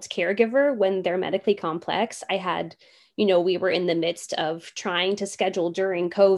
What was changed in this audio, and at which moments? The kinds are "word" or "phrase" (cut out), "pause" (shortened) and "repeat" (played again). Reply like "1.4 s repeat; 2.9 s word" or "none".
none